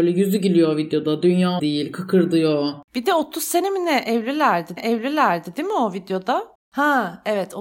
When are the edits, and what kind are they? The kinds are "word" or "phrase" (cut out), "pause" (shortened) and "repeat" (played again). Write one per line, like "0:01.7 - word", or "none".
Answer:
0:01.6 - word
0:04.8 - repeat
0:06.6 - pause